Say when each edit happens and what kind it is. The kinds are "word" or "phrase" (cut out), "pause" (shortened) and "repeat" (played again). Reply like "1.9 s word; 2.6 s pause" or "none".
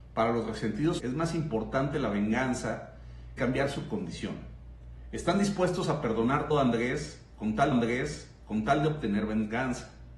1.0 s word; 3.4 s word; 6.5 s word; 7.7 s repeat